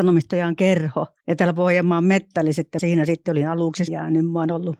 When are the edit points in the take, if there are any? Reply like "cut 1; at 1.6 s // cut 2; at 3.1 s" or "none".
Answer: cut 1; at 1.2 s // cut 2; at 2.8 s // cut 3; at 3.9 s